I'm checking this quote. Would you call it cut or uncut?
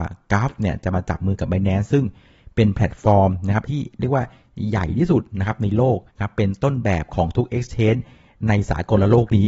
cut